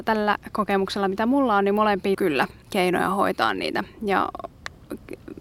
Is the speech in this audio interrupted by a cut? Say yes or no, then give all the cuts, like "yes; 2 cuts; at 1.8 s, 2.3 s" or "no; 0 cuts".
yes; 2 cuts; at 2.1 s, 2.6 s